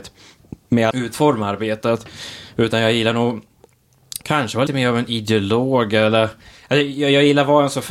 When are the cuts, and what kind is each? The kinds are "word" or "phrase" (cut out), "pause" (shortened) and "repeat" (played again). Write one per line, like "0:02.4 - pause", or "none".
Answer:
0:00.9 - phrase
0:04.2 - pause
0:04.7 - word